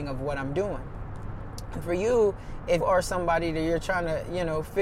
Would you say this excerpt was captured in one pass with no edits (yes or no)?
no